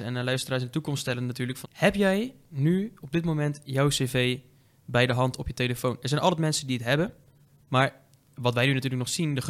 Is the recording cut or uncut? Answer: cut